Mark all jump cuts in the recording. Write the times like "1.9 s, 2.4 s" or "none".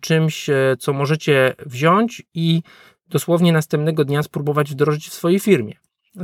none